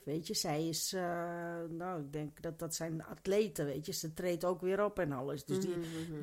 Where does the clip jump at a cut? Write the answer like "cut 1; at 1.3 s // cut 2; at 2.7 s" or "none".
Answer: none